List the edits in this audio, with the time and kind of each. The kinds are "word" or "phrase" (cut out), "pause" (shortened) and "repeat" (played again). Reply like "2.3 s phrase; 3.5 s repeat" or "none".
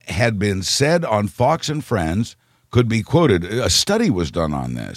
none